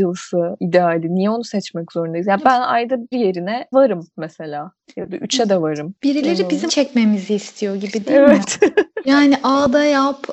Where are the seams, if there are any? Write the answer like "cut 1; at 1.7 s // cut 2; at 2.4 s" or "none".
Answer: cut 1; at 3.1 s // cut 2; at 3.7 s // cut 3; at 6.7 s